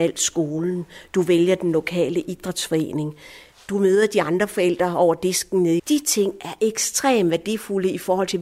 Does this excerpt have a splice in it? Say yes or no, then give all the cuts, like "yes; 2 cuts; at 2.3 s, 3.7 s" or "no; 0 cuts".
yes; 2 cuts; at 3.5 s, 5.8 s